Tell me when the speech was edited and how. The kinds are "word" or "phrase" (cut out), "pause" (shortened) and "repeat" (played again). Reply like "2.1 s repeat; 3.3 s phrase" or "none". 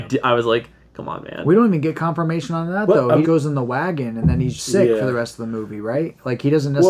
3.2 s word; 4.6 s word